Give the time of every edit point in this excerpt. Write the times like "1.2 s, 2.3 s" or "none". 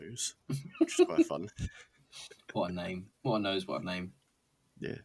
none

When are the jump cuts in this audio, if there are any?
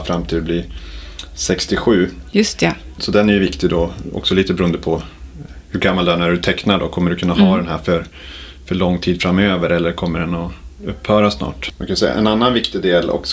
none

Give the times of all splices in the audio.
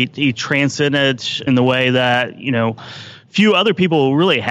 1.5 s

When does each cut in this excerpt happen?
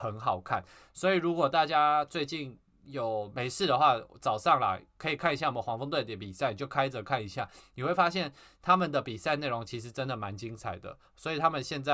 none

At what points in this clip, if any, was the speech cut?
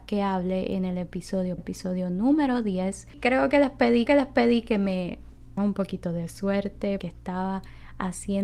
1.6 s, 4.1 s, 5.6 s, 7.0 s

